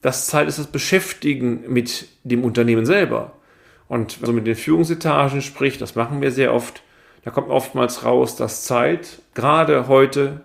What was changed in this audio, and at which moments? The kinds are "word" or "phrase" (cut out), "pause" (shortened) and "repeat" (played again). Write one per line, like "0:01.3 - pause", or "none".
0:04.3 - phrase